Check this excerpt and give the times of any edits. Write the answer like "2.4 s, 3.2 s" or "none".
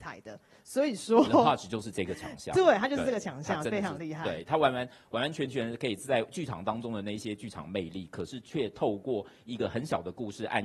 none